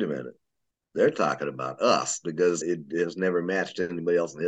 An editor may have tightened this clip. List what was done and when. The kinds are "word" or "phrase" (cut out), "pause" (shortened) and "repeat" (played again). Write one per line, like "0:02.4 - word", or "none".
0:02.6 - word

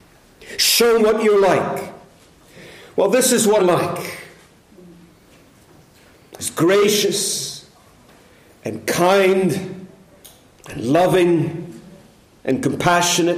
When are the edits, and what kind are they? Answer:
0:01.0 - word
0:03.6 - word

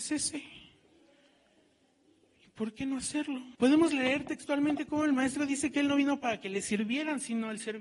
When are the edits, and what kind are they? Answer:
0:03.5 - pause

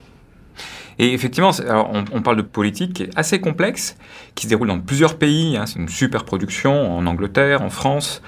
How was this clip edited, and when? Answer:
0:02.4 - phrase
0:05.7 - word

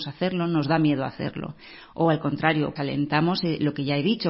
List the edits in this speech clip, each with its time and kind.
0:02.8 - word

